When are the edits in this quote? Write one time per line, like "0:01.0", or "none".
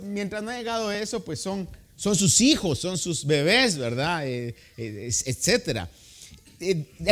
none